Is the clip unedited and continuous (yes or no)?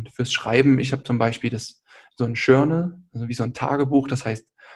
yes